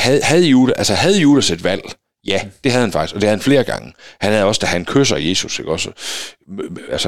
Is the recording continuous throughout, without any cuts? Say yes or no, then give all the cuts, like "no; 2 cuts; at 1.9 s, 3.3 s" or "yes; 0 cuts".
yes; 0 cuts